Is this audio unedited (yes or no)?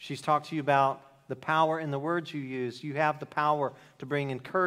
yes